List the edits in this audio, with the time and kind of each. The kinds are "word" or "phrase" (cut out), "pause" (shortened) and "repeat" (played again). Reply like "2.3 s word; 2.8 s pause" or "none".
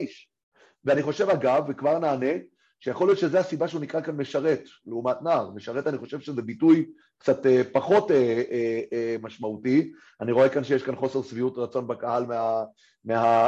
none